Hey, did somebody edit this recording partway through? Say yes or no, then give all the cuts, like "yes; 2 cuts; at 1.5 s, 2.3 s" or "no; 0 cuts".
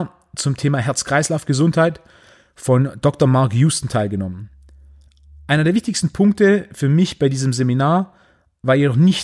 no; 0 cuts